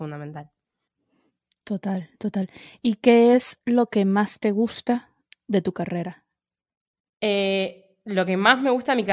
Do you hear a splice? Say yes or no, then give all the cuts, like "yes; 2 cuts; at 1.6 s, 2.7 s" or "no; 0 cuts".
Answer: no; 0 cuts